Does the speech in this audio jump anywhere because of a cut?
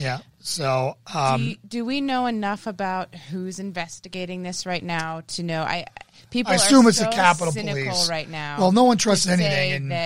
no; 0 cuts

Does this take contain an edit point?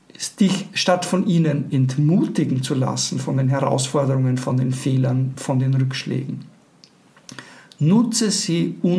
no; 0 cuts

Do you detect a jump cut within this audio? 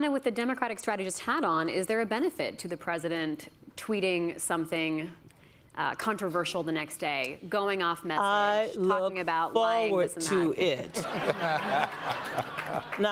no; 0 cuts

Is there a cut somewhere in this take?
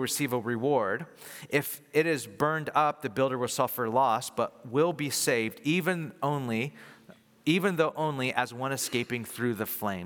no; 0 cuts

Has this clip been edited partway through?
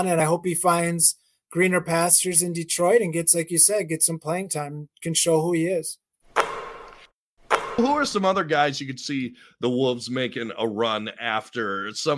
no; 0 cuts

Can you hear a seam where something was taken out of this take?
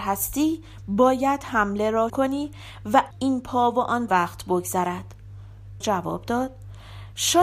yes; 4 cuts; at 2.1 s, 3.1 s, 4.1 s, 5.8 s

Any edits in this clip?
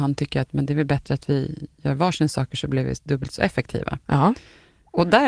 no; 0 cuts

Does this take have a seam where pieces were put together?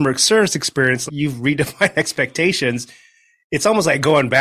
yes; 1 cut; at 1.1 s

